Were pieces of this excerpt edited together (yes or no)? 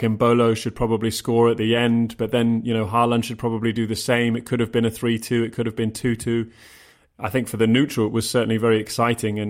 no